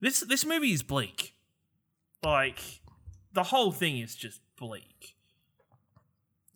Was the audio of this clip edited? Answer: no; 0 cuts

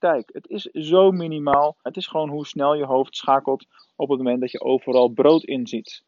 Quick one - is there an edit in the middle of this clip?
yes; 1 cut; at 1.9 s

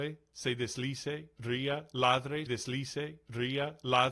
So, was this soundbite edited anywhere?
yes; 1 cut; at 2.5 s

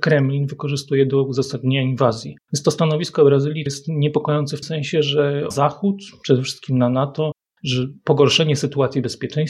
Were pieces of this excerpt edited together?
yes; 4 cuts; at 2.4 s, 3.7 s, 4.6 s, 5.5 s

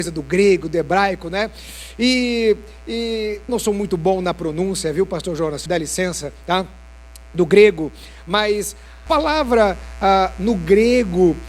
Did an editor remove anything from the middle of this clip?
yes; 3 cuts; at 3.5 s, 5.7 s, 9.1 s

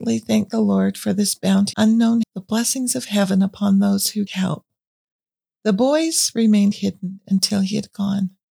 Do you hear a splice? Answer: yes; 3 cuts; at 1.7 s, 2.2 s, 4.3 s

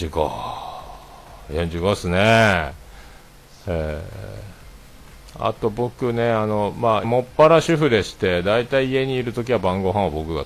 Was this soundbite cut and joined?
yes; 1 cut; at 7.0 s

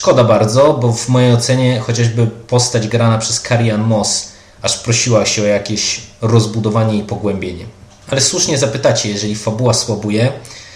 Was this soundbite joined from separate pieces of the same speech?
no; 0 cuts

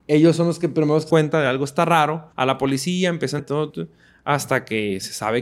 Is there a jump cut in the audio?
yes; 4 cuts; at 1.1 s, 2.3 s, 3.4 s, 3.7 s

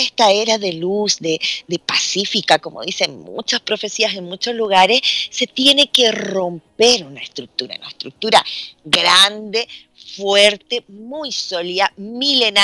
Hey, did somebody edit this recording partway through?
no; 0 cuts

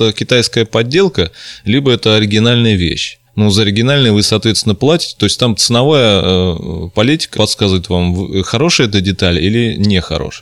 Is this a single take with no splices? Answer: no; 2 cuts; at 3.3 s, 7.3 s

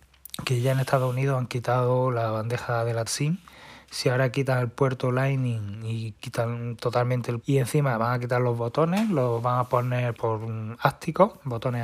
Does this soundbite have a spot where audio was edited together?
yes; 3 cuts; at 3.1 s, 7.4 s, 10.2 s

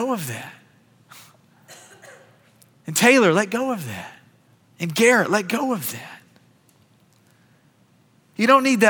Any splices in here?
yes; 1 cut; at 4.5 s

